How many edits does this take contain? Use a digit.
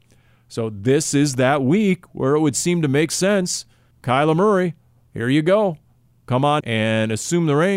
2